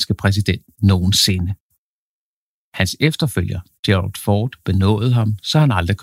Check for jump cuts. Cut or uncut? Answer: uncut